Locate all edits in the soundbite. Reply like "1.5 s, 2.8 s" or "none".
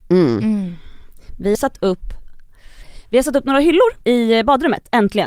1.5 s, 4.0 s

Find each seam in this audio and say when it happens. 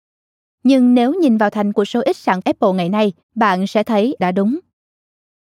1.7 s, 2.4 s, 3.2 s, 4.2 s

